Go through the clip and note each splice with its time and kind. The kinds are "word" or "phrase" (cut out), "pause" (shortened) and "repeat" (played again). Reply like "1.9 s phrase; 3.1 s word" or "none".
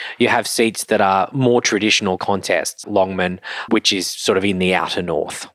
2.2 s phrase; 2.8 s word; 3.7 s word